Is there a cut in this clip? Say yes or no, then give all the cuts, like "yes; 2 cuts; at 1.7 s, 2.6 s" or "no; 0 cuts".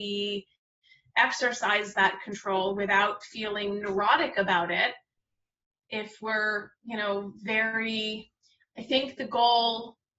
no; 0 cuts